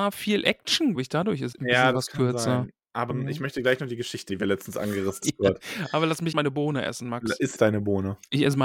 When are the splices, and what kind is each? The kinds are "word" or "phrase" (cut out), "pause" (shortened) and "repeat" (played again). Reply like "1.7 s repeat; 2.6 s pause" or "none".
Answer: 1.0 s word; 1.5 s word; 3.1 s word; 4.3 s word; 5.2 s word; 6.3 s word; 7.6 s word